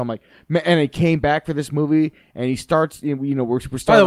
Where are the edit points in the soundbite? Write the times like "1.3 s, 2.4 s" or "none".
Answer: none